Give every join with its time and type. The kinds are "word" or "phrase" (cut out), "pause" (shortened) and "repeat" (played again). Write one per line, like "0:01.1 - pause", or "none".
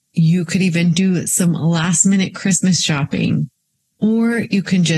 none